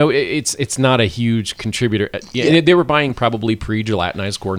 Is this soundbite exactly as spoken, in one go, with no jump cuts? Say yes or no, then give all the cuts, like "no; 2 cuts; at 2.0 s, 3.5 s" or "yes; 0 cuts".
yes; 0 cuts